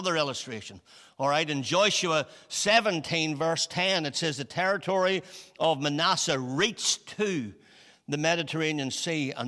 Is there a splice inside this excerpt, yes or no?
no